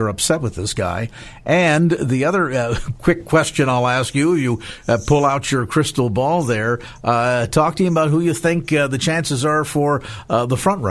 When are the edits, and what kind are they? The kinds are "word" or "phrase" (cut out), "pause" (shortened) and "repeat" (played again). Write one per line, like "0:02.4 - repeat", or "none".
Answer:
none

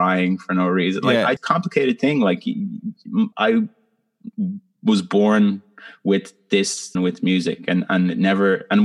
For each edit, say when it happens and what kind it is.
0:01.4 - phrase
0:03.3 - pause
0:06.9 - word

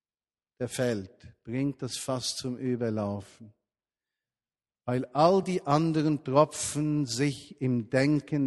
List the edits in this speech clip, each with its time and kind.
none

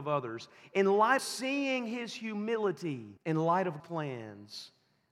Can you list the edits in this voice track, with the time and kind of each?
0:01.2 - word
0:03.2 - pause
0:03.8 - word

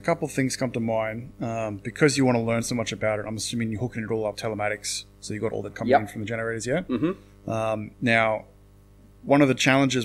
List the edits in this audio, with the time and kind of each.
0:04.3 - word
0:05.7 - word
0:07.9 - pause

